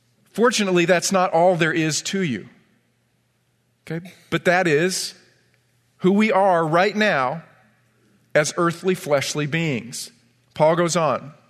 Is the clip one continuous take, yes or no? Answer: yes